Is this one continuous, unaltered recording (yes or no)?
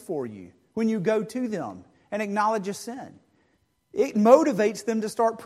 yes